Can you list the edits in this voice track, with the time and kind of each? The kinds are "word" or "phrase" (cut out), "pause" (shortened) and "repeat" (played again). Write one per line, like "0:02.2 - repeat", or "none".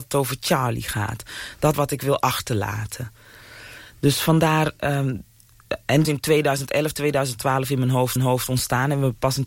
0:01.7 - word
0:06.0 - phrase
0:08.2 - repeat